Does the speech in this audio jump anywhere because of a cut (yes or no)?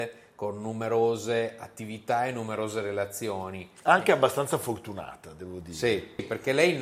no